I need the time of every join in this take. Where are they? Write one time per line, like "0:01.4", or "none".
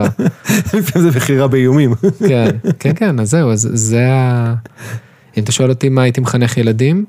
none